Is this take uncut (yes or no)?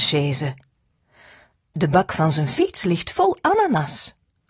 yes